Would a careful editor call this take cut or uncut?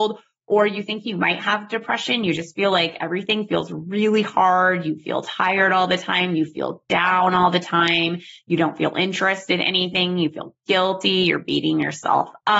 uncut